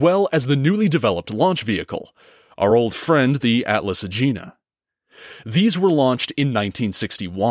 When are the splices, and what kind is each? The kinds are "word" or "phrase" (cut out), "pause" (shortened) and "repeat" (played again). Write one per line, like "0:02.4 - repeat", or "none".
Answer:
none